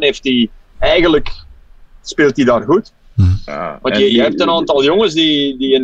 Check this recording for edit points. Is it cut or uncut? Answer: uncut